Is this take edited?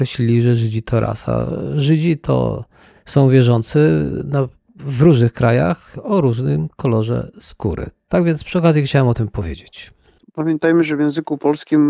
no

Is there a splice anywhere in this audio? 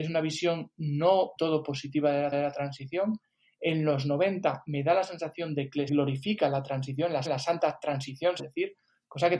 yes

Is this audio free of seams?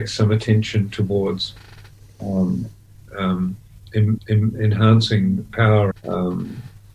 no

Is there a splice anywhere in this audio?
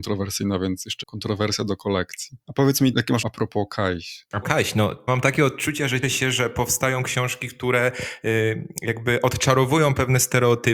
yes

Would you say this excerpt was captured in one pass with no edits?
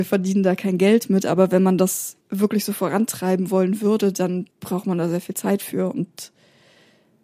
no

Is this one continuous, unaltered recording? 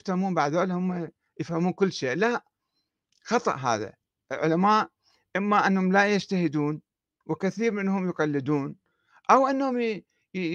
yes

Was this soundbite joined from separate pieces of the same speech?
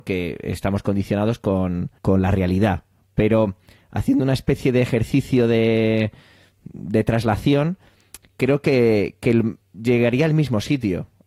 yes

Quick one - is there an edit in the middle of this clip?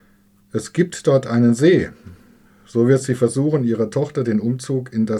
no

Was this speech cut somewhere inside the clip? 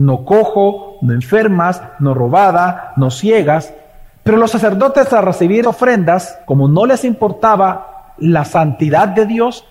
yes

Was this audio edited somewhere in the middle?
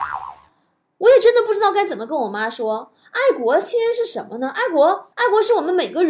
yes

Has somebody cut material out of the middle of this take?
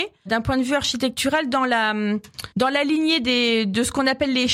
yes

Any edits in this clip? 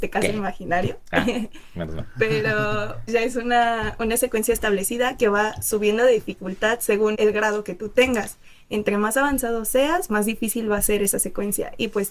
yes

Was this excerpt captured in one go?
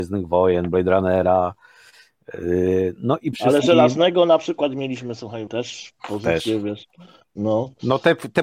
no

